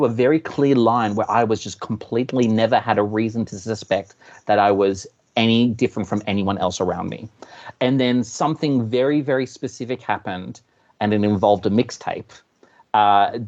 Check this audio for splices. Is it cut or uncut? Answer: uncut